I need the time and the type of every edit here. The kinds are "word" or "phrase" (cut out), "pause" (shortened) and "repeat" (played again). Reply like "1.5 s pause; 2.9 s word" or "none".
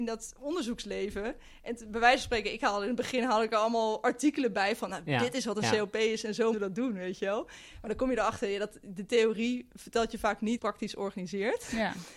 6.5 s word; 10.6 s phrase